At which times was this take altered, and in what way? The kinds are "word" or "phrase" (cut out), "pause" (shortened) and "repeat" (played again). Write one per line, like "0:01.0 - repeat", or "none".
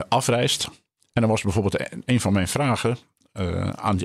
none